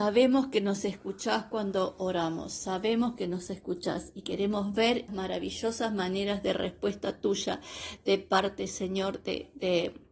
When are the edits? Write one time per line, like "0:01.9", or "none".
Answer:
0:05.1